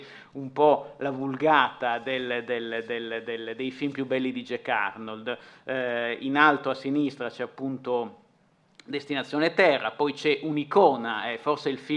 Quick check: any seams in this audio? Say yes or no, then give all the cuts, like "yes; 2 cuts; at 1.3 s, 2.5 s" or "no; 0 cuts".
no; 0 cuts